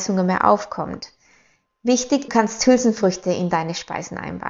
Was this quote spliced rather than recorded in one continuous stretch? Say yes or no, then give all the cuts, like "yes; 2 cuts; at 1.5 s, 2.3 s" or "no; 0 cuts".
yes; 1 cut; at 2.3 s